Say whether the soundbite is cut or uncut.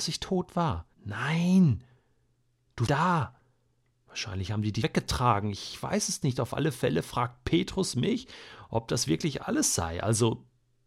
cut